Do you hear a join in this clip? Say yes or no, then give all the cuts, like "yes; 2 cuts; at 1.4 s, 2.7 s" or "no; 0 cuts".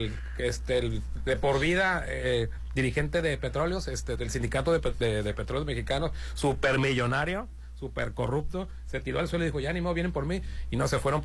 yes; 1 cut; at 4.2 s